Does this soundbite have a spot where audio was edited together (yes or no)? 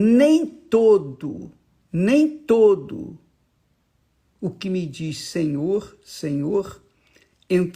no